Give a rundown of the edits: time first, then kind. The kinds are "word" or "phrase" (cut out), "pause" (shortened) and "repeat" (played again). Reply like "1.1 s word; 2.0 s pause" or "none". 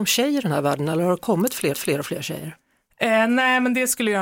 1.7 s repeat